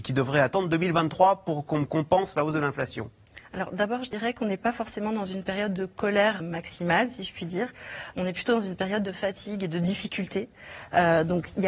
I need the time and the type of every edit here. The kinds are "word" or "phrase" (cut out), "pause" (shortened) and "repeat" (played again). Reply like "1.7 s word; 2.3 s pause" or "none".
6.4 s word